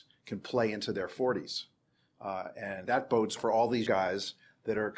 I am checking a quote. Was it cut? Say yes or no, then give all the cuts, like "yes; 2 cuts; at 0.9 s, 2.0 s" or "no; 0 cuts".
yes; 3 cuts; at 2.9 s, 3.4 s, 3.9 s